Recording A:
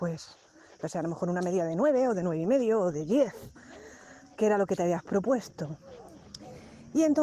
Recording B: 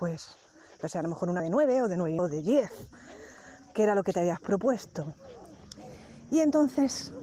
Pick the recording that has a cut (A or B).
B